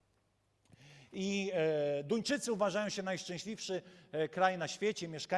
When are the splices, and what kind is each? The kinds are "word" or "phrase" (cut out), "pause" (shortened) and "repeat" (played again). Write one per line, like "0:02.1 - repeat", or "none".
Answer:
none